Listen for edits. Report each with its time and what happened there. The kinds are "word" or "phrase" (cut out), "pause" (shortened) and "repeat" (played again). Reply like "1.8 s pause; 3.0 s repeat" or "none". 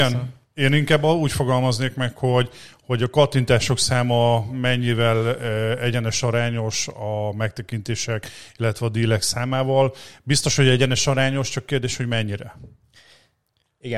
none